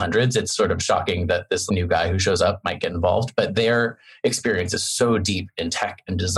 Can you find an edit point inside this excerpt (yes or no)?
yes